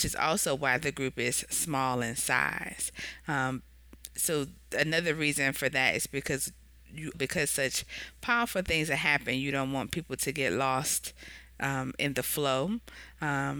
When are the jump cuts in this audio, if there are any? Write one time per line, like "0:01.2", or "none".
0:07.1